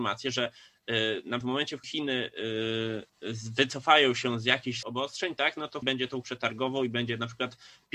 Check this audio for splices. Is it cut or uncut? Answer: cut